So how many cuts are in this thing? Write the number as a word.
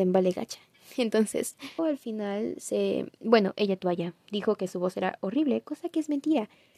two